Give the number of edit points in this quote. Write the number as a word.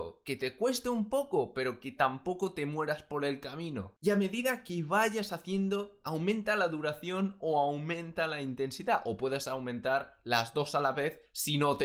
zero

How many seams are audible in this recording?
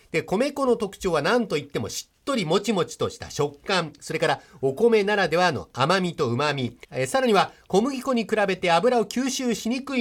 one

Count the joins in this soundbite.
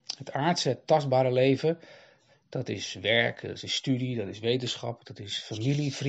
zero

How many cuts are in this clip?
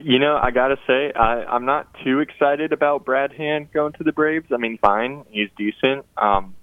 one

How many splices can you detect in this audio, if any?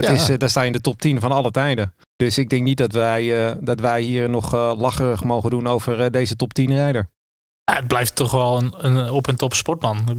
two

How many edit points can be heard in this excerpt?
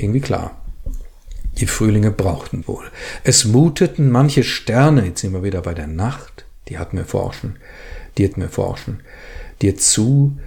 two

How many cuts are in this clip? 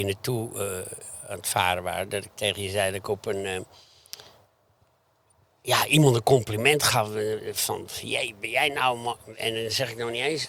zero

